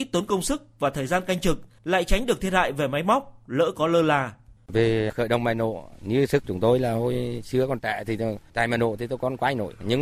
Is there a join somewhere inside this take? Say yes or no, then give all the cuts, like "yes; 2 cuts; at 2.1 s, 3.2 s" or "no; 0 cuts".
yes; 1 cut; at 1.8 s